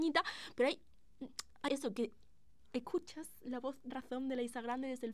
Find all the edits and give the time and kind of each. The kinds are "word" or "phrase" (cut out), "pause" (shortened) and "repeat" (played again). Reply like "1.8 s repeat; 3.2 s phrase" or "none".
1.7 s word; 3.9 s word